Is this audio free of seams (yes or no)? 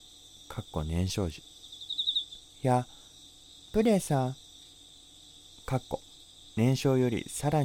yes